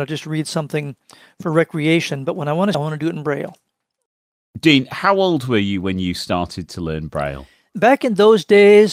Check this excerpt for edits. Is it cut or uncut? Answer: cut